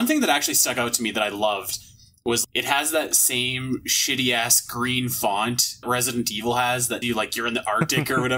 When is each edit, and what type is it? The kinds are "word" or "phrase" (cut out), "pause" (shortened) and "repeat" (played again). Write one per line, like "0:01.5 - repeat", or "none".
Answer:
0:02.4 - word
0:05.8 - word
0:07.0 - word